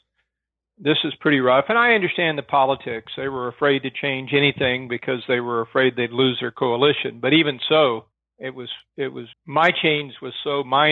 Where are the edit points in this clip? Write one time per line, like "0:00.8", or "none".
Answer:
0:08.1
0:09.3

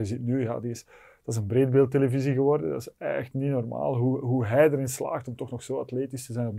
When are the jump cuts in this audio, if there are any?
none

